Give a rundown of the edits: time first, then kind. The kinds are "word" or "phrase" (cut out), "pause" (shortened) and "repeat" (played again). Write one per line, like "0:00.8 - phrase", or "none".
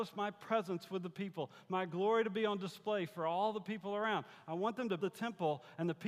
0:05.0 - word